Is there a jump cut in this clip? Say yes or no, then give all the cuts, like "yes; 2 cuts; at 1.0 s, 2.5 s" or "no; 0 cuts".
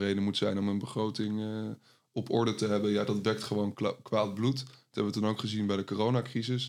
no; 0 cuts